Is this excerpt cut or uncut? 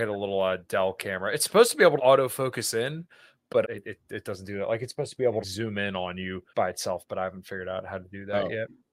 cut